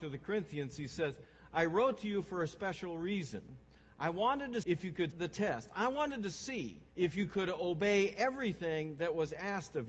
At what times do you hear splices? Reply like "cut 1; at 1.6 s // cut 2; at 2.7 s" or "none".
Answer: cut 1; at 4.6 s // cut 2; at 5.1 s // cut 3; at 6.9 s